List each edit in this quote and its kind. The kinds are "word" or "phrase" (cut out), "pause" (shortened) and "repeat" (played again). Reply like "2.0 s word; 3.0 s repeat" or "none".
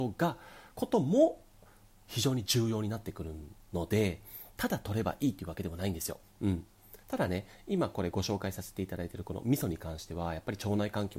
6.2 s pause; 7.0 s pause